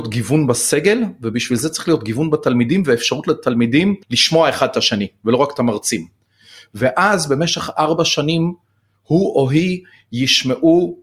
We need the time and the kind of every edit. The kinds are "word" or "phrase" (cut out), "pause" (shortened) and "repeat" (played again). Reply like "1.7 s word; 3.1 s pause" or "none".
4.0 s pause